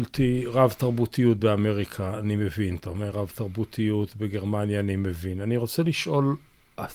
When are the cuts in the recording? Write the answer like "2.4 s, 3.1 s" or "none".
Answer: none

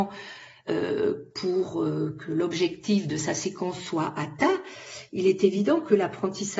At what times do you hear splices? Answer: none

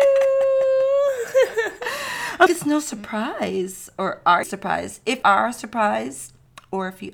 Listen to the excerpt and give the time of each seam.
2.5 s, 4.4 s, 5.2 s

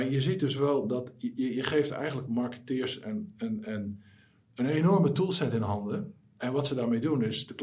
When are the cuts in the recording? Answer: none

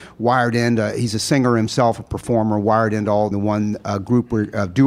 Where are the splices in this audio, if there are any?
3.3 s

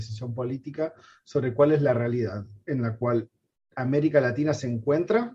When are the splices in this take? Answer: none

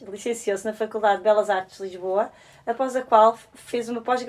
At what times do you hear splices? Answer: none

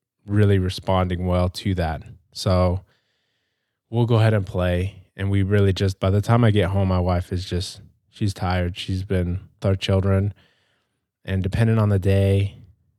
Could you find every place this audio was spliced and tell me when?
6.0 s, 9.6 s

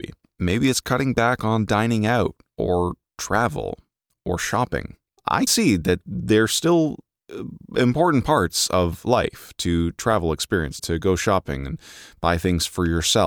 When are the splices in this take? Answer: 5.5 s, 10.8 s

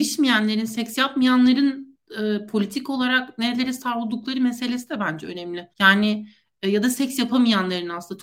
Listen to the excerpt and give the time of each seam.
5.7 s

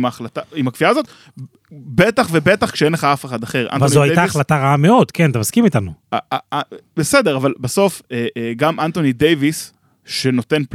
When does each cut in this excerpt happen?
none

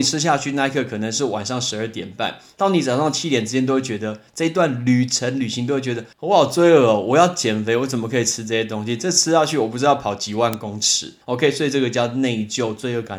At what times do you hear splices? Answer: 6.1 s, 11.2 s

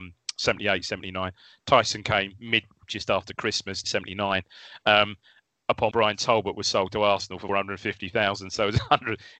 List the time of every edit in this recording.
2.8 s, 3.8 s, 5.9 s, 7.5 s

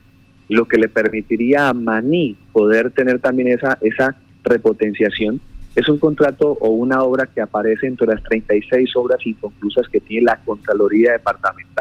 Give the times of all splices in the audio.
2.4 s

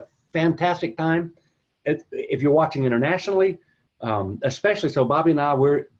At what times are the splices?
none

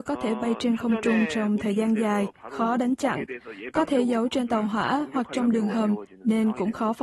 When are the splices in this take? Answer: none

